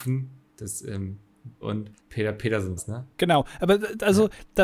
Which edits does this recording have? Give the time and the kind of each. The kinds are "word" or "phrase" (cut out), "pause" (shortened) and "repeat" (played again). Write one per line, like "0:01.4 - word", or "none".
0:01.6 - word
0:02.0 - pause
0:02.8 - word
0:03.1 - pause